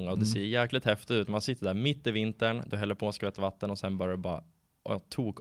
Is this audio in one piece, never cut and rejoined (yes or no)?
yes